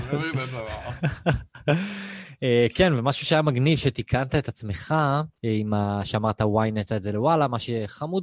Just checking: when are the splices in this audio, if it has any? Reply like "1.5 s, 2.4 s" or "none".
5.4 s, 6.9 s